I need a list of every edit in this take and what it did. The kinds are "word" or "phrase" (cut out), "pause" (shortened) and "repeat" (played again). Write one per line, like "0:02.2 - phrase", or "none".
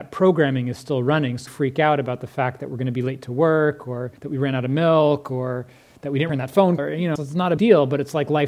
0:01.5 - word
0:04.2 - pause
0:06.3 - word
0:06.8 - word
0:07.2 - word
0:07.6 - word